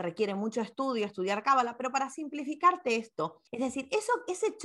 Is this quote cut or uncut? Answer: cut